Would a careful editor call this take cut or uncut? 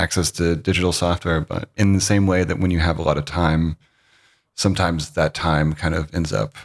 uncut